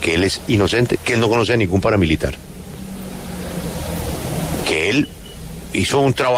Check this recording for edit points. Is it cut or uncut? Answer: uncut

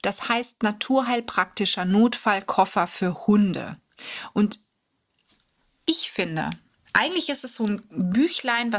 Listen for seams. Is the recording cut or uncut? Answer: uncut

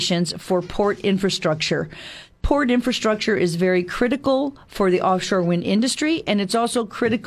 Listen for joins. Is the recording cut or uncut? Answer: uncut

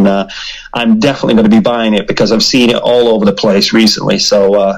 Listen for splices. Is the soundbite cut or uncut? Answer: uncut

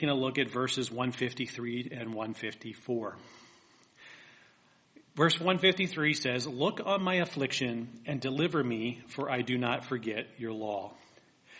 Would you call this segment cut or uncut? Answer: uncut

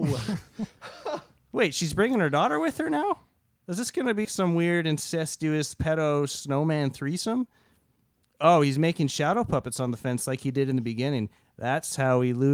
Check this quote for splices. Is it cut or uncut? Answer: cut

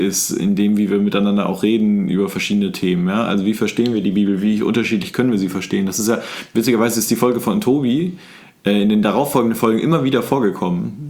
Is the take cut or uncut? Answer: uncut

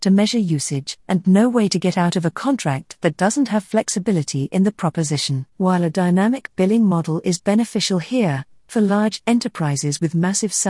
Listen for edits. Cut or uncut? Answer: cut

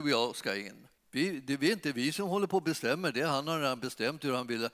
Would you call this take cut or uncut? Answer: cut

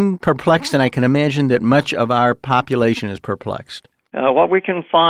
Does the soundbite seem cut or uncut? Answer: uncut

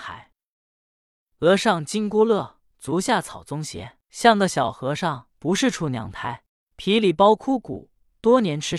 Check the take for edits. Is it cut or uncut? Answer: cut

